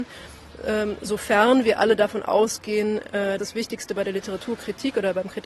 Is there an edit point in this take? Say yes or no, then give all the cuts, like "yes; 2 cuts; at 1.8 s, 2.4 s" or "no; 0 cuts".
yes; 1 cut; at 3.4 s